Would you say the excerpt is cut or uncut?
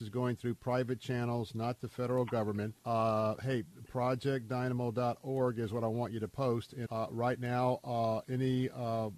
cut